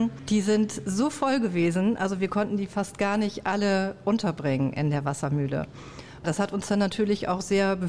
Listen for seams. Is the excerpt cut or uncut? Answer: uncut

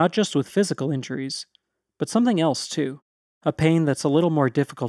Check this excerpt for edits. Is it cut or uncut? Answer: uncut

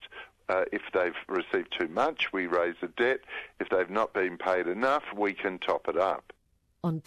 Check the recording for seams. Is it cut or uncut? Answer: uncut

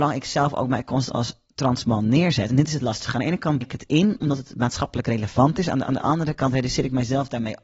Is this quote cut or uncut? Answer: cut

